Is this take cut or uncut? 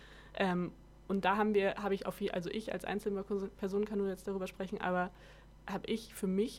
uncut